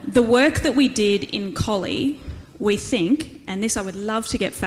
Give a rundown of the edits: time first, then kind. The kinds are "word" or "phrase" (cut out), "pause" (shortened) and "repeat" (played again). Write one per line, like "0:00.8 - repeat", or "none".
none

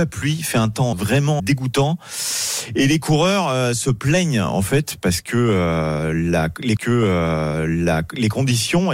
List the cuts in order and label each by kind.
0:00.9 - word
0:01.4 - word
0:06.8 - repeat

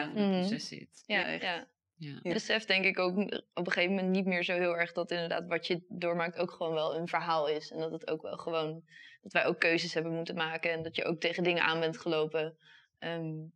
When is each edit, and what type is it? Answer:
0:01.2 - word
0:02.3 - word

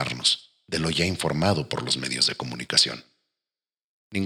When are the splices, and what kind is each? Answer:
none

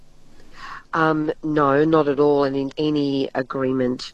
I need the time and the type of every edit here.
0:01.4 - pause
0:02.7 - word

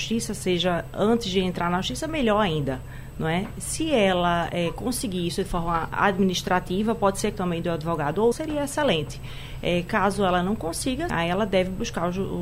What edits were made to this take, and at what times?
0:07.3 - phrase
0:08.3 - word
0:11.1 - word

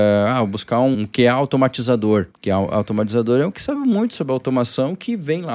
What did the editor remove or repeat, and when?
0:00.9 - word
0:02.3 - pause
0:03.5 - word

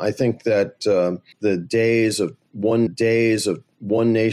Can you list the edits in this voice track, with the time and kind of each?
0:01.3 - pause
0:02.9 - repeat

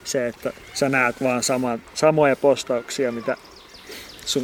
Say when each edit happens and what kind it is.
none

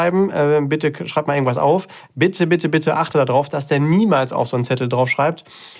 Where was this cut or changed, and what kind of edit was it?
none

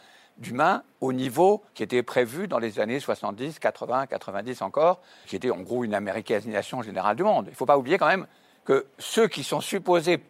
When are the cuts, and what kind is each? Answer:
0:01.7 - pause
0:05.2 - word
0:08.9 - pause

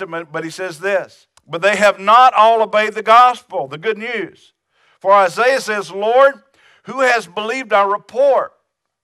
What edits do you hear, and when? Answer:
0:01.4 - pause

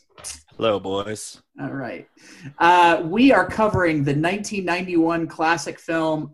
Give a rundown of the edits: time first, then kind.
0:01.5 - pause

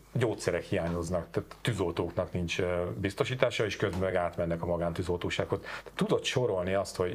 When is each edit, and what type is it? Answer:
none

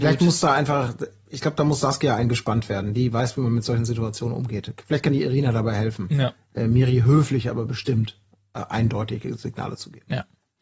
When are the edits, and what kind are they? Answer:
none

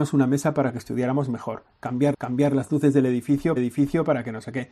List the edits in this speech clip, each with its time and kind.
0:02.1 - repeat
0:03.6 - repeat

